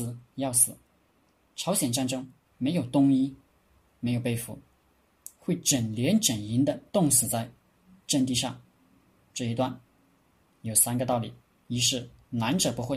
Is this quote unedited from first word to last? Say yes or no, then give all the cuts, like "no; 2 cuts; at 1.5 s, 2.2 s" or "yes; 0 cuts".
no; 1 cut; at 6.9 s